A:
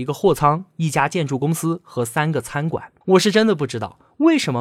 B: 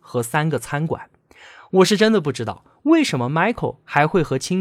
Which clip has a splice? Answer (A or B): A